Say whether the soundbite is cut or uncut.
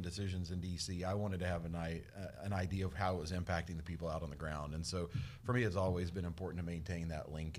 uncut